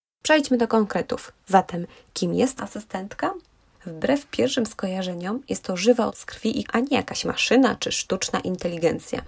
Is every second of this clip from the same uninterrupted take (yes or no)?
no